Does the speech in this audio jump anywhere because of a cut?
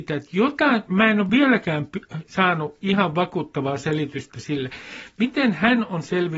no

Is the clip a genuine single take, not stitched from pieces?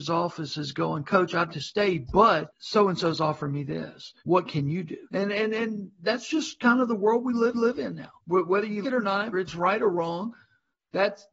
no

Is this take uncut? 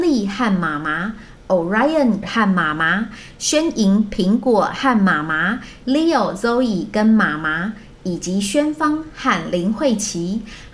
no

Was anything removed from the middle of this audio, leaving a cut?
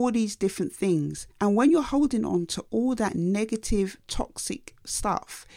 yes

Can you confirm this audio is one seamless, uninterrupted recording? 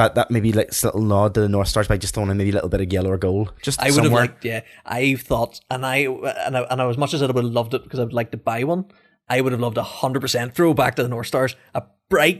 yes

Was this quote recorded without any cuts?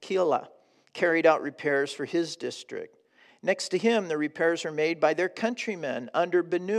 yes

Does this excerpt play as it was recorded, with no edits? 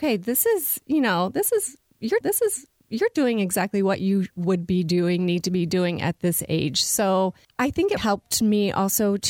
no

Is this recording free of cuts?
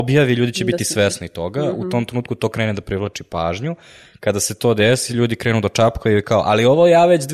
yes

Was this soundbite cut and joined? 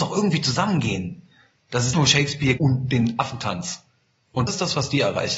yes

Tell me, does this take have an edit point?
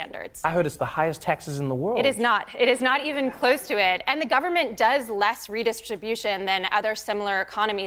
no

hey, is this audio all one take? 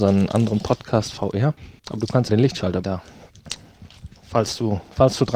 no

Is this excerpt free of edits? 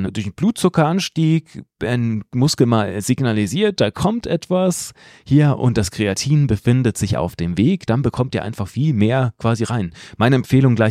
yes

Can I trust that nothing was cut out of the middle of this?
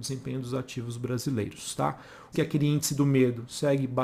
no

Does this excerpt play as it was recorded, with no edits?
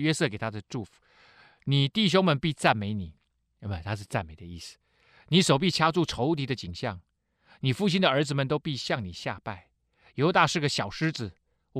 yes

